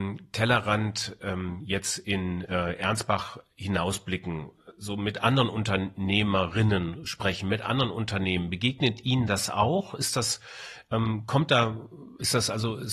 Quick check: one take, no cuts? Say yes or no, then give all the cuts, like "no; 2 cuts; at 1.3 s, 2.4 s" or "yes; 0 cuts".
yes; 0 cuts